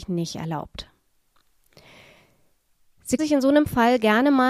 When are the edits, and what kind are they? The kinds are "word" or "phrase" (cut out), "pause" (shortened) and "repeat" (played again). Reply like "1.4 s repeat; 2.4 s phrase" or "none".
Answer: 3.2 s word